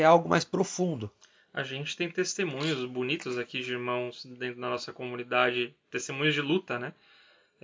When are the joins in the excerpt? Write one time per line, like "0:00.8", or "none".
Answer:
none